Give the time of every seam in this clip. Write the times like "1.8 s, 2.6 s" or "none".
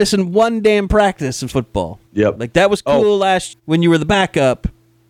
1.5 s, 2.1 s, 3.5 s